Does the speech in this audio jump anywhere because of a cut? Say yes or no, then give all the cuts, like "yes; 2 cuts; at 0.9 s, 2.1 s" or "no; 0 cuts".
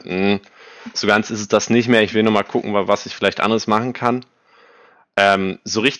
no; 0 cuts